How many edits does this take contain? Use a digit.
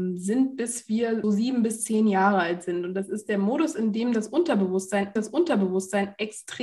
2